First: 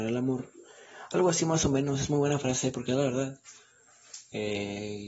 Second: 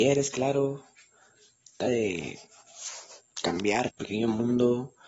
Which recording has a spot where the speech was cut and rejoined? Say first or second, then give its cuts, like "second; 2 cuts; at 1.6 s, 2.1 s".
second; 2 cuts; at 1.9 s, 3.9 s